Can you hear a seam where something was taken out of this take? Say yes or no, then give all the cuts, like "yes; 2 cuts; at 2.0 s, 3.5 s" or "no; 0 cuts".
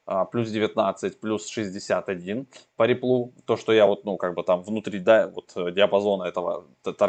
no; 0 cuts